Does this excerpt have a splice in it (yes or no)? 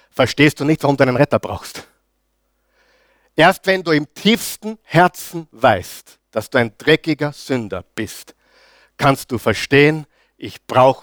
no